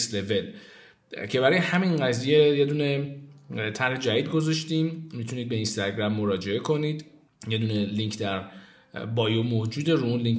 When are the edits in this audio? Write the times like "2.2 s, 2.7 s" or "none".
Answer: 7.3 s